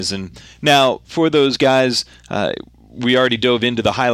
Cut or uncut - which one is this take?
uncut